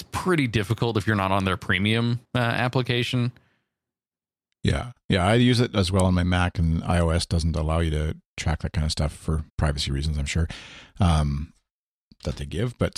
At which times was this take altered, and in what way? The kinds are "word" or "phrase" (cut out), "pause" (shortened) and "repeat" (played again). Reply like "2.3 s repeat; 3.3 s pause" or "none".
2.2 s pause; 8.3 s pause; 9.5 s pause